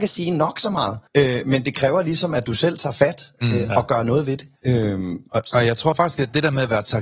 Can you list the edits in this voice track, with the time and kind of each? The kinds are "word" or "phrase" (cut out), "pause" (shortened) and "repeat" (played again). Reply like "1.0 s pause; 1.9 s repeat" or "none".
1.1 s pause; 4.6 s pause